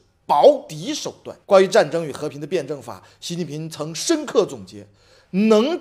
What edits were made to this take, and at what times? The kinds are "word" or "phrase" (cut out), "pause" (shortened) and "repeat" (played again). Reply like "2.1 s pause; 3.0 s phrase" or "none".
1.4 s pause

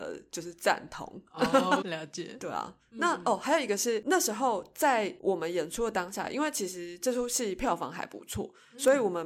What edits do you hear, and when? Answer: 1.8 s word

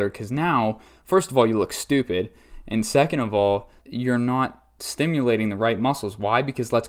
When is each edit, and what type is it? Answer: 3.8 s word

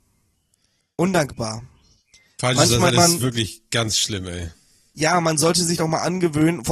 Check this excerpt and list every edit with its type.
2.9 s word; 5.8 s word

